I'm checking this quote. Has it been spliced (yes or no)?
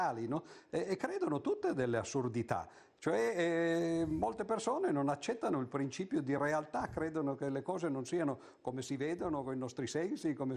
no